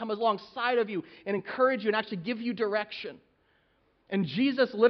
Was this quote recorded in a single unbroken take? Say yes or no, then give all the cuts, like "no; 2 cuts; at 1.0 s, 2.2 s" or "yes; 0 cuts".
yes; 0 cuts